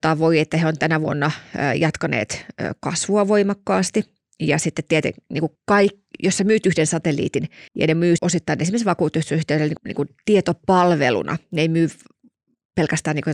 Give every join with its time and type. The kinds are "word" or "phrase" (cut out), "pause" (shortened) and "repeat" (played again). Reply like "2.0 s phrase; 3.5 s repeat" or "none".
5.6 s pause; 7.7 s pause; 8.2 s word; 9.8 s word